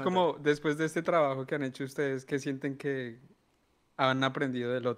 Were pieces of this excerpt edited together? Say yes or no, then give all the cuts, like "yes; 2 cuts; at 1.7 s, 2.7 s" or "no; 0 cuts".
no; 0 cuts